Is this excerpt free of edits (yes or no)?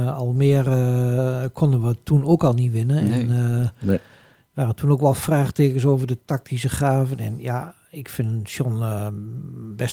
yes